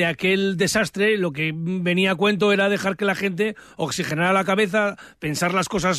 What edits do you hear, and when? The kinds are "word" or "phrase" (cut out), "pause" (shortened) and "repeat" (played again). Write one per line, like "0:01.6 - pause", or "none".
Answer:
none